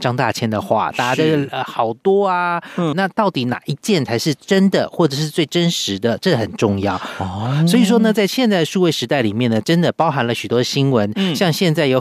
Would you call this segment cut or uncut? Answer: cut